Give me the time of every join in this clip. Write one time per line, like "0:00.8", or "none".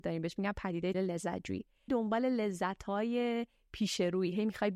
0:00.9
0:01.9